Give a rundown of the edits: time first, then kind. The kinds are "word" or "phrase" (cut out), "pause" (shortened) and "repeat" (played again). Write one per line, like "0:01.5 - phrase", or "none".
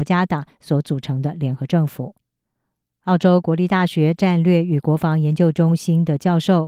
none